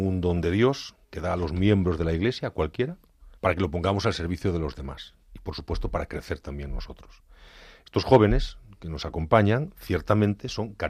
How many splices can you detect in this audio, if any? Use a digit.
3